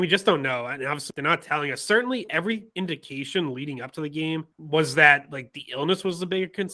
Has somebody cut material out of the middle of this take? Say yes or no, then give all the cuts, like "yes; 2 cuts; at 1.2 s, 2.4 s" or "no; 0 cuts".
yes; 2 cuts; at 1.1 s, 4.5 s